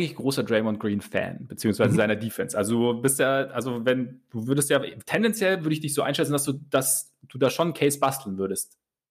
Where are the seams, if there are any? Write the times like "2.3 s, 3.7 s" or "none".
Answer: none